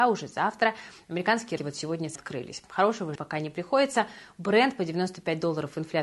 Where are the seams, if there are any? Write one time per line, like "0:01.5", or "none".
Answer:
0:01.6
0:02.2
0:03.2